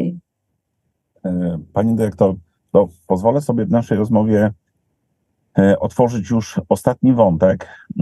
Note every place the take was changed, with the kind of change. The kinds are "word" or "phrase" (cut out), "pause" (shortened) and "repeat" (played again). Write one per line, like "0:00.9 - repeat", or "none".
none